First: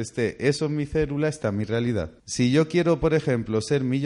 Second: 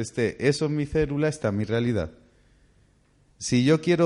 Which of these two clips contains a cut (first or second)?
first